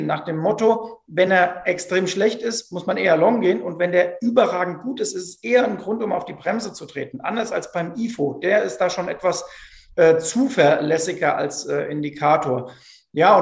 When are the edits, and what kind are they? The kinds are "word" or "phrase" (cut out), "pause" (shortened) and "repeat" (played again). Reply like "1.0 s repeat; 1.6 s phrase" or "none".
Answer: none